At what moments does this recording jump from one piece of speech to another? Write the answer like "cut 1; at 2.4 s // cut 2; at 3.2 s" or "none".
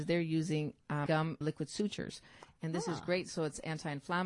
cut 1; at 1.1 s // cut 2; at 1.4 s